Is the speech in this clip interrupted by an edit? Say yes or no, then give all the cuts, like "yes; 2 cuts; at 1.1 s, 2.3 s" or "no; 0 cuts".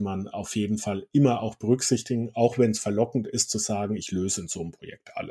no; 0 cuts